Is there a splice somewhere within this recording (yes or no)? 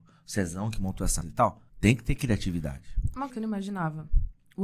yes